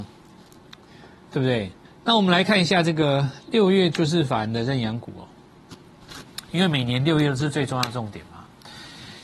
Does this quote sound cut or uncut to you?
cut